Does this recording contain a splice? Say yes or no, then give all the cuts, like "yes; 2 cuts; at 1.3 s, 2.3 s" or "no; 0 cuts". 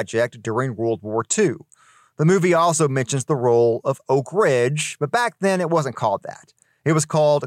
no; 0 cuts